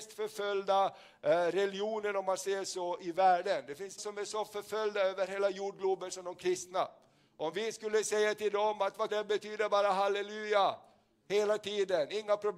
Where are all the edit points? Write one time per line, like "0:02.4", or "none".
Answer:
0:04.0
0:09.1

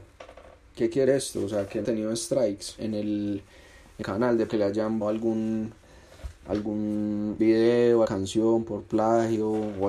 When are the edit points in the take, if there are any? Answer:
0:01.0
0:01.8
0:02.8
0:04.0
0:04.5
0:05.0
0:07.4
0:08.0

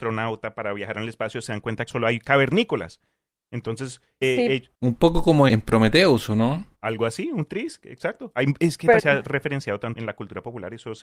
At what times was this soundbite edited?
0:01.9
0:04.2
0:04.7
0:05.5
0:06.7
0:09.0
0:10.0

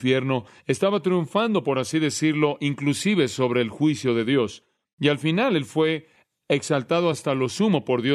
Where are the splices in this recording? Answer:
none

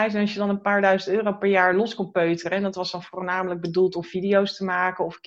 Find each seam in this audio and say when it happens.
none

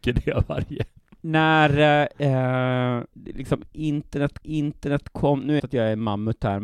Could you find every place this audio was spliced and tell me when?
0:03.1
0:04.4
0:05.6

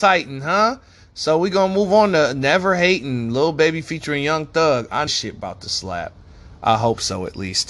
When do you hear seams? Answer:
0:05.1

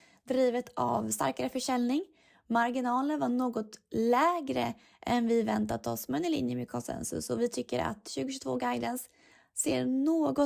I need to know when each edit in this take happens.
none

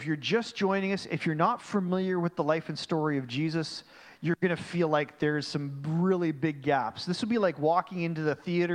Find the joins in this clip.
none

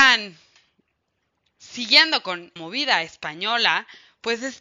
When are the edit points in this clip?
0:01.5
0:02.6

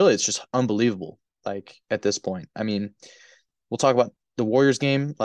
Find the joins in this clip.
none

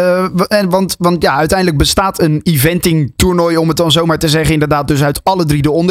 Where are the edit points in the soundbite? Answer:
none

